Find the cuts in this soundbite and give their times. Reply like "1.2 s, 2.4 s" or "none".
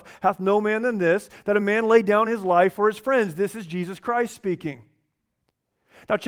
none